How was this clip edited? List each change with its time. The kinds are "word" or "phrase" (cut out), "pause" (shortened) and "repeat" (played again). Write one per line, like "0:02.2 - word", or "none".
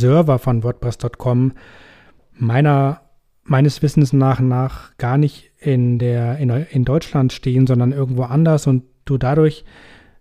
none